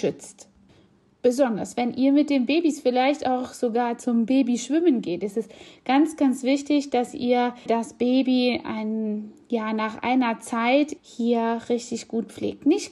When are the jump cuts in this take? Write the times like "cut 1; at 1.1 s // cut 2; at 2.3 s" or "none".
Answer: cut 1; at 7.7 s // cut 2; at 11.0 s